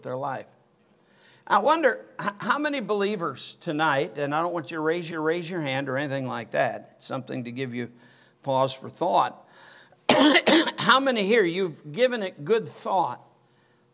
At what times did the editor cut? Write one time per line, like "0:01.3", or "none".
0:05.1